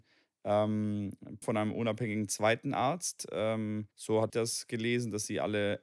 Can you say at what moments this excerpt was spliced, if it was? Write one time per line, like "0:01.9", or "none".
0:01.4
0:03.9
0:04.3